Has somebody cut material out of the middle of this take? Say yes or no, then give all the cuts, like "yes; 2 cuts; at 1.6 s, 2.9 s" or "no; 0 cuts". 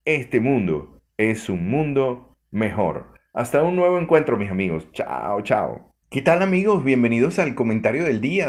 yes; 1 cut; at 6.0 s